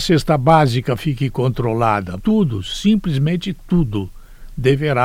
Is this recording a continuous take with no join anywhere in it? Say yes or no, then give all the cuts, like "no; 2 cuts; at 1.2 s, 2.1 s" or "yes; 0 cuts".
no; 1 cut; at 2.2 s